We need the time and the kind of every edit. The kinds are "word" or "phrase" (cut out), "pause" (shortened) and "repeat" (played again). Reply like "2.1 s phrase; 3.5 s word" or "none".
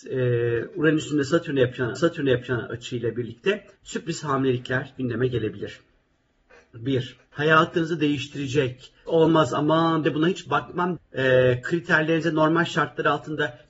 2.0 s repeat; 3.7 s pause; 7.3 s pause; 9.1 s word; 10.0 s word; 11.0 s word